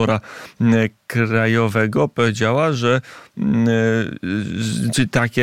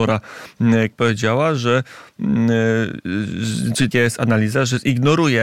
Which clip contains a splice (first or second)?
second